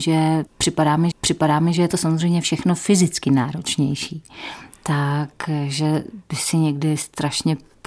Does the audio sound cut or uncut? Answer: cut